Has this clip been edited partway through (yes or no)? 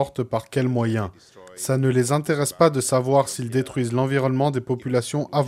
no